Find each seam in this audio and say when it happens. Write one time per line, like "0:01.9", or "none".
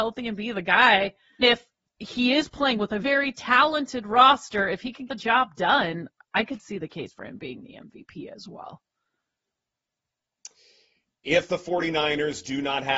0:01.4
0:03.0
0:05.1